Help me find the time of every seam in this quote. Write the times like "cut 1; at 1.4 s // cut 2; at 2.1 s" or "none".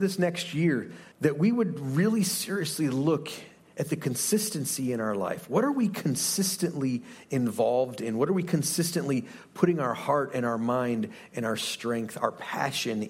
cut 1; at 1.1 s